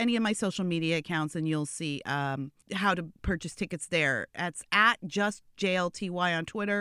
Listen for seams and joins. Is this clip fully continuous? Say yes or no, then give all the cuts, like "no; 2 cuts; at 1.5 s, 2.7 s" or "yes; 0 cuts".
no; 2 cuts; at 2.6 s, 3.1 s